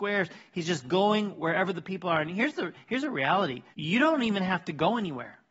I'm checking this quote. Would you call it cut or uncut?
cut